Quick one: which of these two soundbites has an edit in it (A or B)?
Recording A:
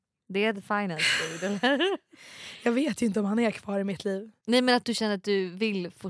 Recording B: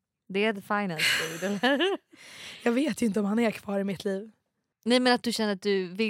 A